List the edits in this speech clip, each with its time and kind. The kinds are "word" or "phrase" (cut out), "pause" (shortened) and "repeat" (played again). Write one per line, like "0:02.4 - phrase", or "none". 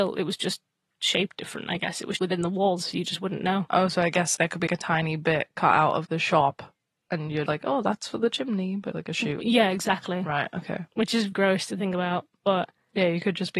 0:02.2 - word
0:04.4 - word
0:04.7 - word
0:06.0 - word
0:07.5 - word
0:08.9 - word
0:11.3 - word